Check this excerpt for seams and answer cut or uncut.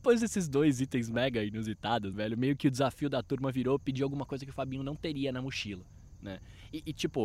cut